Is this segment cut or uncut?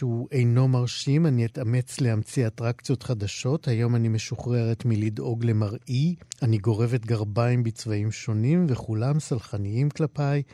cut